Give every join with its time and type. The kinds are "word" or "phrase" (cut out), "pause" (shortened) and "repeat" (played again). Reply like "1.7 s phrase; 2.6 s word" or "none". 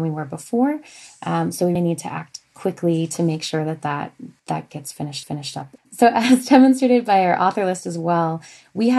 1.8 s word; 4.4 s pause; 5.2 s repeat